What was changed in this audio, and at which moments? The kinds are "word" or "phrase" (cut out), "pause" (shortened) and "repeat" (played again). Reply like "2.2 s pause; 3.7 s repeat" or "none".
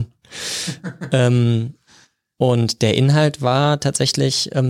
none